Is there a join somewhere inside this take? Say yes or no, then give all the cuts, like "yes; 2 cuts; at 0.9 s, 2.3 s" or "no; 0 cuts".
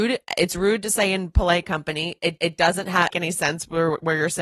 yes; 2 cuts; at 2.4 s, 3.1 s